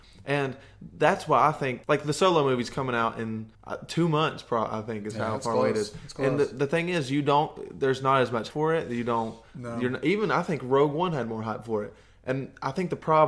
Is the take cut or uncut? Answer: cut